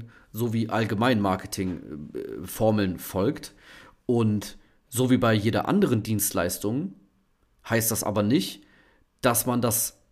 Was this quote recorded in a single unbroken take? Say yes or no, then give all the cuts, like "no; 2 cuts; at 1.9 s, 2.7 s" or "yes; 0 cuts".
yes; 0 cuts